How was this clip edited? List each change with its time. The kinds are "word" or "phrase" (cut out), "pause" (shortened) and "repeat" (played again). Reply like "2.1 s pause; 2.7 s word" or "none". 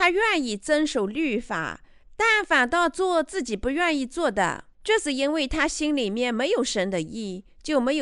4.7 s pause